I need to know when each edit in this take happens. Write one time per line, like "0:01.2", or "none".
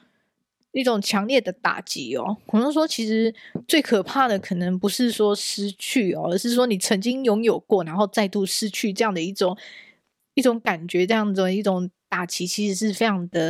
none

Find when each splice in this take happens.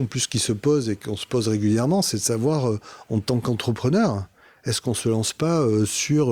none

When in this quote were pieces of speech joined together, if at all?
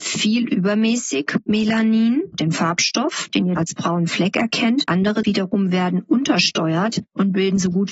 0:02.3
0:03.6
0:04.9
0:05.2

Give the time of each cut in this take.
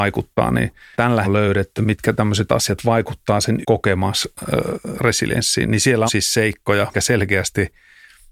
0:00.9
0:01.2
0:01.7
0:02.5
0:03.6
0:06.1
0:06.9

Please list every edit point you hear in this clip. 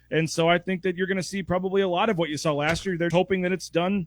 0:03.1

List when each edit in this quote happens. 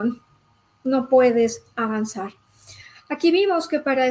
none

